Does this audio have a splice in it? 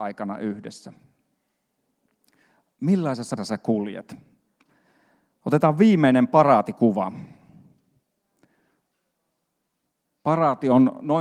yes; 1 cut; at 3.4 s

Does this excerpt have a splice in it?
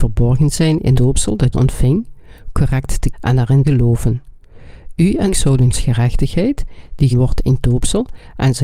yes; 8 cuts; at 0.9 s, 1.5 s, 3.1 s, 3.6 s, 5.3 s, 5.7 s, 7.1 s, 7.6 s

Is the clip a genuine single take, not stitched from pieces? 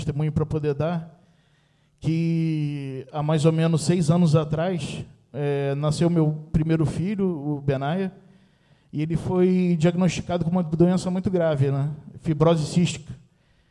yes; 0 cuts

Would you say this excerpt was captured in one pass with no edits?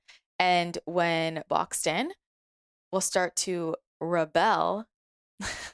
no; 1 cut; at 1.5 s

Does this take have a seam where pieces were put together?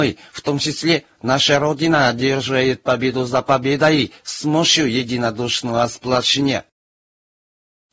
no; 0 cuts

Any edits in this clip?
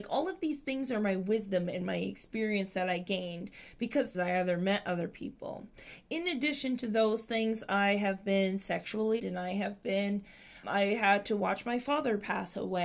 yes; 3 cuts; at 4.1 s, 9.2 s, 10.6 s

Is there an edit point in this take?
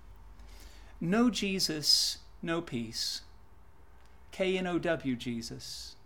no; 0 cuts

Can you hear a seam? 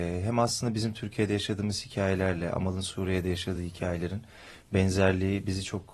no; 0 cuts

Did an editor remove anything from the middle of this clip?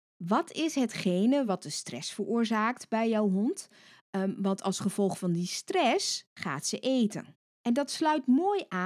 no; 0 cuts

